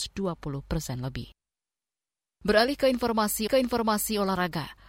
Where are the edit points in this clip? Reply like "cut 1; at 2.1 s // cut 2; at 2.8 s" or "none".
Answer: cut 1; at 3.5 s